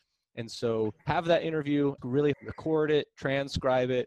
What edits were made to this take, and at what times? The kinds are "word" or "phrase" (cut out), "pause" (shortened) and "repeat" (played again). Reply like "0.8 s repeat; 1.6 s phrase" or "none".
1.0 s pause; 2.0 s word; 2.3 s phrase